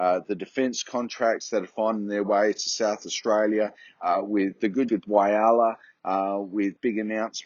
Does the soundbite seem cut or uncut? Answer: cut